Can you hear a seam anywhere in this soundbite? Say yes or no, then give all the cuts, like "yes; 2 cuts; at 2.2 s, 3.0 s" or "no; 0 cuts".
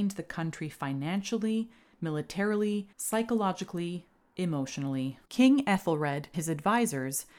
yes; 3 cuts; at 2.9 s, 5.3 s, 6.3 s